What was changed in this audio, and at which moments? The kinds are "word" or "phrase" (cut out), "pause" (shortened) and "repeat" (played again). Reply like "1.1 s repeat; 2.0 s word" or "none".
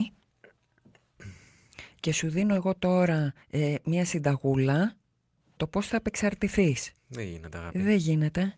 3.4 s pause; 5.6 s word; 7.0 s pause